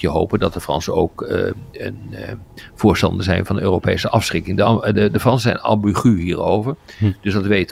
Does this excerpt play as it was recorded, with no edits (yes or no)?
yes